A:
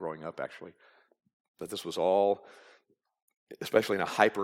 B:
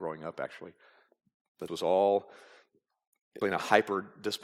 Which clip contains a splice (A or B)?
B